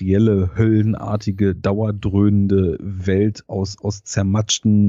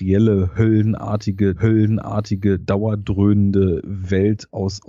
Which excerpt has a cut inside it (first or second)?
second